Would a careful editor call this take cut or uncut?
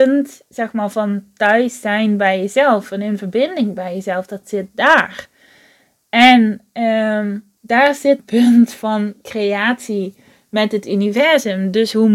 cut